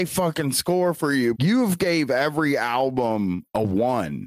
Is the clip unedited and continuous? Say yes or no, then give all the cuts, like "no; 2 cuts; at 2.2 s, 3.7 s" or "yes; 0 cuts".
no; 1 cut; at 1.3 s